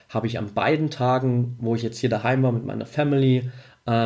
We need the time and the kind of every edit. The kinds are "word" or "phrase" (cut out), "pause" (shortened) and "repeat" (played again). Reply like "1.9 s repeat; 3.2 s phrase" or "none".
none